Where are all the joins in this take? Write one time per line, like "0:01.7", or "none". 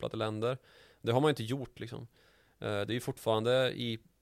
none

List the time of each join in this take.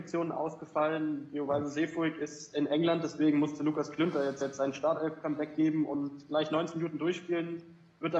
0:04.4

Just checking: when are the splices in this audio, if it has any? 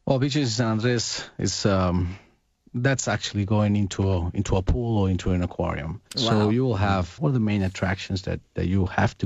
0:06.1
0:07.2

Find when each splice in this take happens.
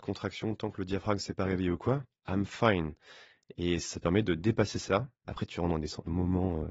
none

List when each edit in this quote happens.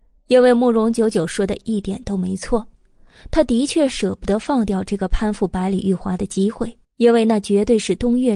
0:06.8

